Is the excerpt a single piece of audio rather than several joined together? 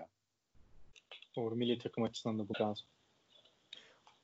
no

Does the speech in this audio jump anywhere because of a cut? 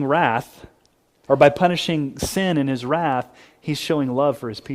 no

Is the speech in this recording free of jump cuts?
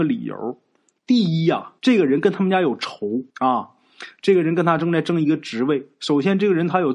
no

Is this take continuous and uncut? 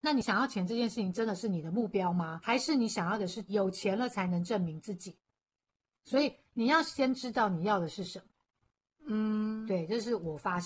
yes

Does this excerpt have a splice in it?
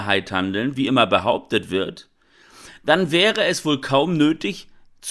no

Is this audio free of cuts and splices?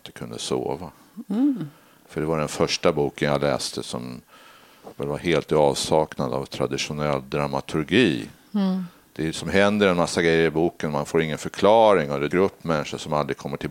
no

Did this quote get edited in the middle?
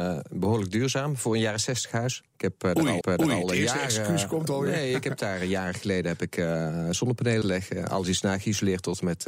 yes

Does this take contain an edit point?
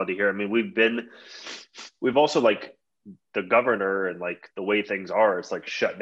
no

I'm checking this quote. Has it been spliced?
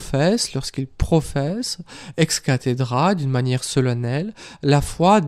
no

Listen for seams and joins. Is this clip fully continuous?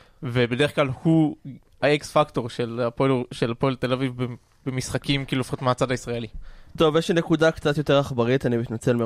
yes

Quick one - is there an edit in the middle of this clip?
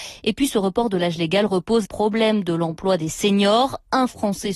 yes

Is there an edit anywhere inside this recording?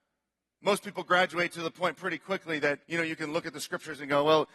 yes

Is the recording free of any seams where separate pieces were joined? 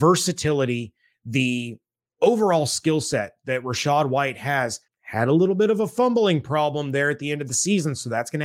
no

